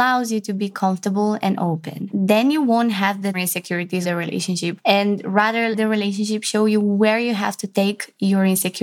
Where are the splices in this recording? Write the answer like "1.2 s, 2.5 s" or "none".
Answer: 3.3 s, 4.0 s, 5.7 s